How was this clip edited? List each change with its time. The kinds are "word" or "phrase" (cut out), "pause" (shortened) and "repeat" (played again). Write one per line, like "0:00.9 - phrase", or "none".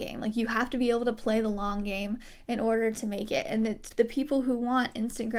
0:03.9 - word